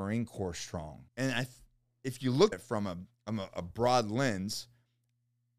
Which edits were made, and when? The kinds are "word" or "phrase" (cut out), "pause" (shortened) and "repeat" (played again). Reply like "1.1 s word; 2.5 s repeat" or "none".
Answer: 1.1 s pause; 2.5 s word

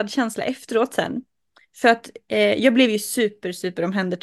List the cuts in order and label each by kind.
none

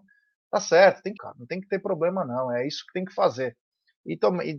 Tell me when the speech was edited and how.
1.2 s phrase

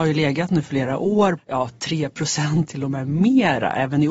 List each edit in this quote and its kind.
1.4 s word; 2.7 s word

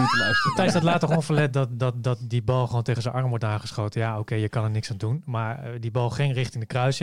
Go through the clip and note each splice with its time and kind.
none

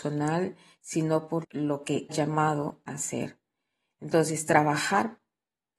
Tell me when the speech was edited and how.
1.4 s word; 2.1 s word; 2.9 s word

